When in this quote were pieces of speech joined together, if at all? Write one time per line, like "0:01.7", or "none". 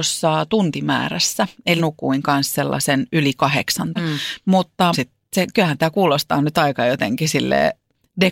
0:01.8
0:04.0
0:04.9